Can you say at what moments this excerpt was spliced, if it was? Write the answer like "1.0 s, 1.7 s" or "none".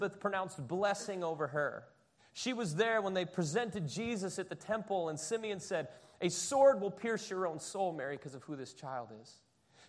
2.2 s